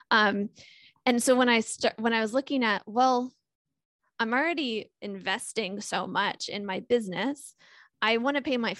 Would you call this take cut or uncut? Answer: uncut